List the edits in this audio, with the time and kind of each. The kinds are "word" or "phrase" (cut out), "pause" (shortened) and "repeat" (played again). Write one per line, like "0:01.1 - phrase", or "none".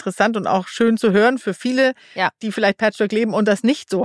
none